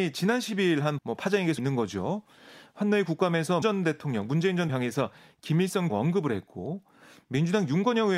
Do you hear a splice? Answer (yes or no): yes